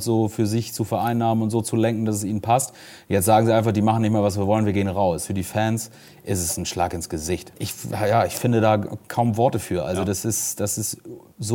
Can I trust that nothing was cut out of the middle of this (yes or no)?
yes